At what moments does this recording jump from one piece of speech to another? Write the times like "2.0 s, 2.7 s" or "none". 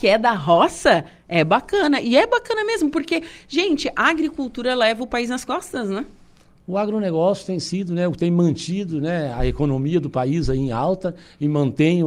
none